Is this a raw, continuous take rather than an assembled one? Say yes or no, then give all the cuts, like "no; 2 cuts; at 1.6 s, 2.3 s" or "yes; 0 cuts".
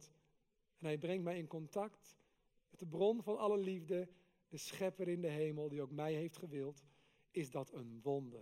yes; 0 cuts